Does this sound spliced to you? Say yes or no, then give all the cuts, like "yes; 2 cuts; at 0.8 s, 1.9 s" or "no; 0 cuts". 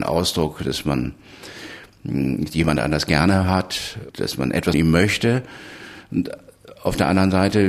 yes; 2 cuts; at 4.1 s, 4.7 s